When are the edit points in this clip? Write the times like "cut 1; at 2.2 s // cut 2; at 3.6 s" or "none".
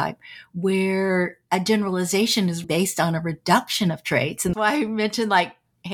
cut 1; at 2.6 s // cut 2; at 4.5 s